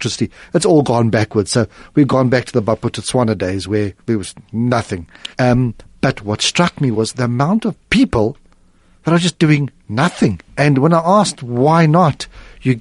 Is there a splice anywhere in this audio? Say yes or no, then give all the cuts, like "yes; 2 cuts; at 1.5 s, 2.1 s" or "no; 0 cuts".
yes; 3 cuts; at 4.0 s, 5.3 s, 10.5 s